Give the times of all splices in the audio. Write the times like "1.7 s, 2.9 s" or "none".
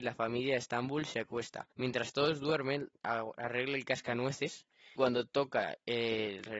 1.7 s, 3.0 s, 5.0 s